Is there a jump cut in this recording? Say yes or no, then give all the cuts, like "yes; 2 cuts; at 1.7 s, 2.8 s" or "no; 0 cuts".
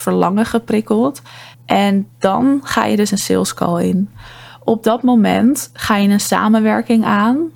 yes; 1 cut; at 1.5 s